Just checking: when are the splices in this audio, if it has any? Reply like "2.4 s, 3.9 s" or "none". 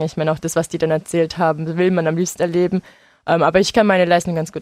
2.4 s